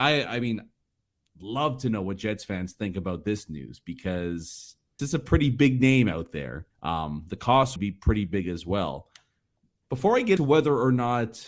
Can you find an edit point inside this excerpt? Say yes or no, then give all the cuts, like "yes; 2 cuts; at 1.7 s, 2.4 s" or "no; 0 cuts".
yes; 4 cuts; at 5.0 s, 6.7 s, 7.8 s, 10.4 s